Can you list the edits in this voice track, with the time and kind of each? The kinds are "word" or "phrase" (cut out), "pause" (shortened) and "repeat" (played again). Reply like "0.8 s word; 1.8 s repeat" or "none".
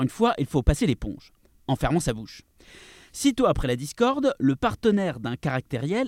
none